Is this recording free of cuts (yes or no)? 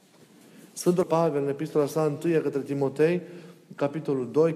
no